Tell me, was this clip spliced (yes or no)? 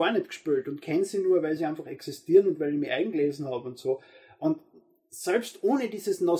no